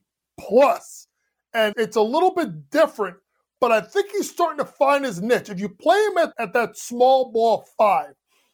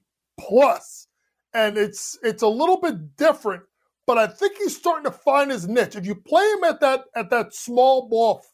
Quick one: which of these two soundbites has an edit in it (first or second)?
first